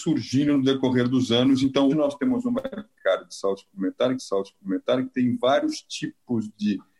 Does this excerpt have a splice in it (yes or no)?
yes